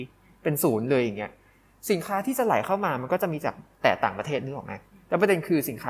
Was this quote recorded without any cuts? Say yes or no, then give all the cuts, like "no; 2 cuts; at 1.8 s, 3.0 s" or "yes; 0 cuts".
yes; 0 cuts